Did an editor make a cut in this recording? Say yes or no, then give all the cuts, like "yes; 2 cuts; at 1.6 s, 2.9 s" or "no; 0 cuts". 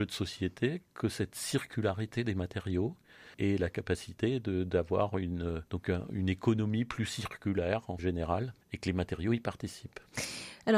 yes; 4 cuts; at 3.3 s, 5.7 s, 8.0 s, 8.6 s